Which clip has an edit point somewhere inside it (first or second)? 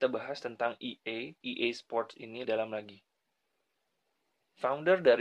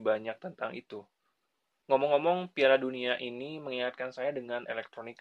first